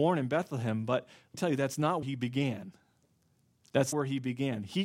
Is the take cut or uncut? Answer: cut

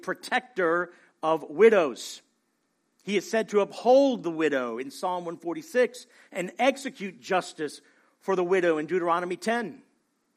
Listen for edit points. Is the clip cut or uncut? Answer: uncut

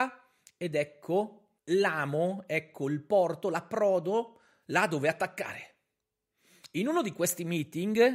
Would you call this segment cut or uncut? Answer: cut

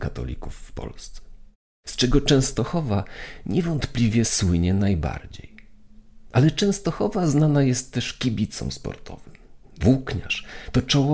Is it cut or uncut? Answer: uncut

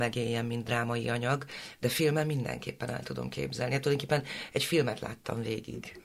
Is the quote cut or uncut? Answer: uncut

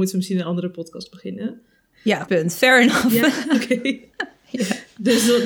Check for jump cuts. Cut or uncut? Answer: cut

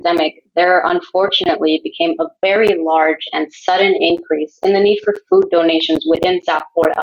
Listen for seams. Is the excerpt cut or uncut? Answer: uncut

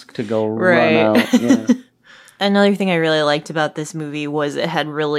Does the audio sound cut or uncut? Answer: uncut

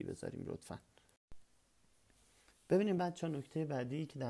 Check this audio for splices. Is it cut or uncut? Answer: uncut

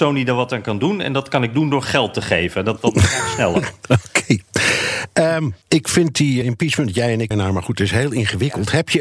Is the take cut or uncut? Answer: cut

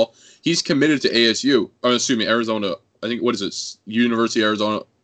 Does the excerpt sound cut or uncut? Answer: uncut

